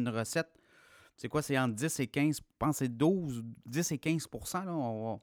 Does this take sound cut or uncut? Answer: uncut